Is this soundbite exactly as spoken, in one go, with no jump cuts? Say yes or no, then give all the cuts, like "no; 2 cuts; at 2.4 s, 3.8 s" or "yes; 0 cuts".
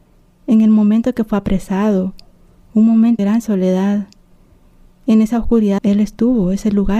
no; 2 cuts; at 3.2 s, 5.8 s